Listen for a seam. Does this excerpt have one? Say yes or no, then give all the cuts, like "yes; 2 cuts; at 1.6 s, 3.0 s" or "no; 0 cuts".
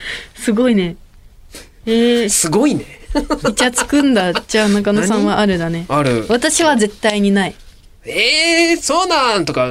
yes; 1 cut; at 7.8 s